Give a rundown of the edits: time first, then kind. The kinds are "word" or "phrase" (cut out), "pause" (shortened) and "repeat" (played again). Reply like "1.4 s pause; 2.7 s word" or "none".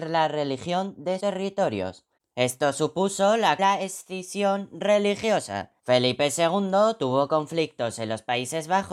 1.2 s word; 2.2 s pause; 3.6 s phrase; 5.8 s pause

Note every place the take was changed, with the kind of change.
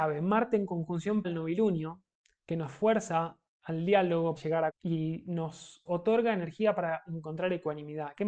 1.2 s word; 4.4 s word; 4.7 s word; 5.9 s word

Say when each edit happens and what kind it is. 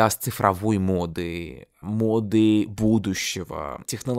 none

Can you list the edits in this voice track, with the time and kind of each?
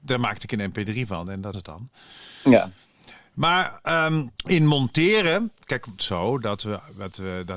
1.5 s word; 4.4 s pause; 6.0 s phrase

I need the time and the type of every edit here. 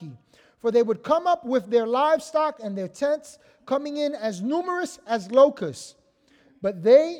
none

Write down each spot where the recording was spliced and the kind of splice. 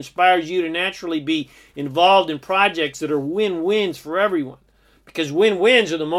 none

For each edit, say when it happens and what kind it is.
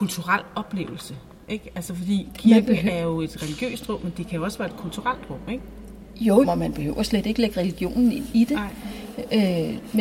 6.4 s word

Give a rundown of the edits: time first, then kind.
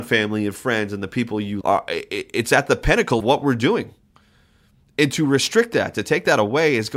1.6 s word; 3.2 s word

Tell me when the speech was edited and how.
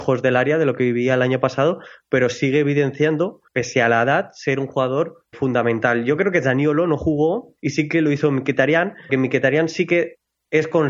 3.5 s pause; 5.3 s word; 7.6 s pause; 9.1 s word

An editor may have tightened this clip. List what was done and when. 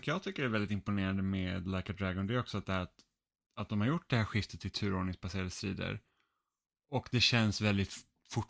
none

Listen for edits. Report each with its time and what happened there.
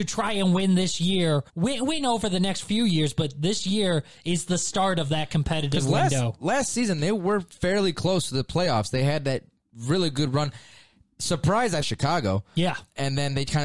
1.5 s pause; 11.8 s phrase

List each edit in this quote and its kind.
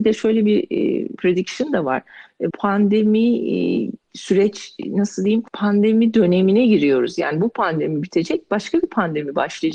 1.2 s word; 2.5 s word; 5.5 s pause

